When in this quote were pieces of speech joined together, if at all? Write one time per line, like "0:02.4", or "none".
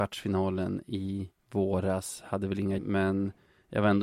0:01.4
0:02.8